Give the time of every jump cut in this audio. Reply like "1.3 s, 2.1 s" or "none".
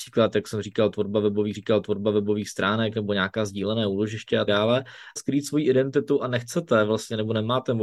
1.5 s, 4.5 s, 5.2 s

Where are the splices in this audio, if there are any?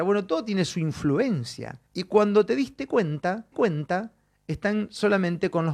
1.9 s, 3.5 s

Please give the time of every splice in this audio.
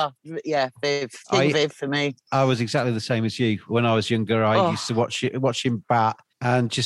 1.2 s

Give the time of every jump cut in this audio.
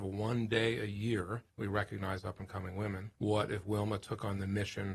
1.5 s, 3.2 s

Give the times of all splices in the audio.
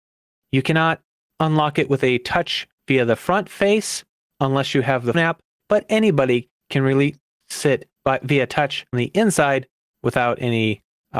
5.1 s, 8.9 s

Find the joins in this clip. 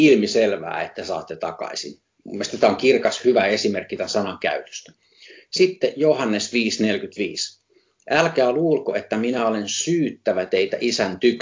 none

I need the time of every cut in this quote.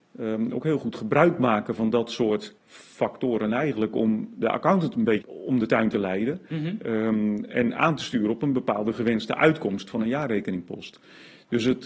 2.6 s, 5.2 s

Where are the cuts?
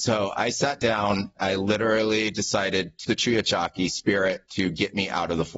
1.4 s, 3.0 s

